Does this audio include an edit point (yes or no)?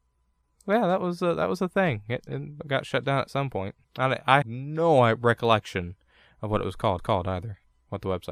yes